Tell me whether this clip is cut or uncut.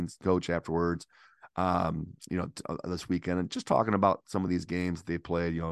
uncut